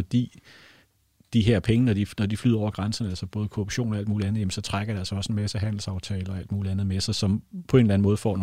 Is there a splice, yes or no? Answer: no